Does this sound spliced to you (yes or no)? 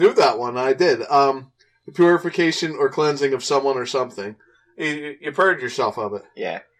no